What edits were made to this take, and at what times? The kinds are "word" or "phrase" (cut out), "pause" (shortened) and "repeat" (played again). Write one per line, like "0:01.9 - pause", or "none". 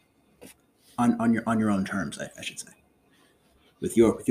none